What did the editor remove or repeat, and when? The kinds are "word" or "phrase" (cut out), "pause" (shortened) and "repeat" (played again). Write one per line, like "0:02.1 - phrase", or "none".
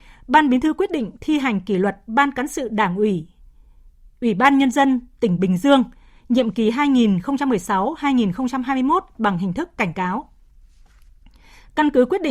none